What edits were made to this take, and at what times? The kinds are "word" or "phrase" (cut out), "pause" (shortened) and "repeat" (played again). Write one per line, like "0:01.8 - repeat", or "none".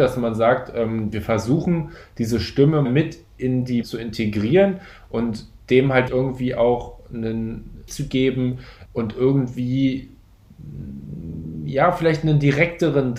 0:02.9 - word
0:03.8 - phrase
0:06.1 - word
0:07.9 - word
0:08.9 - word